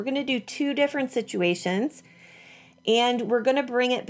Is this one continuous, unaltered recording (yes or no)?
yes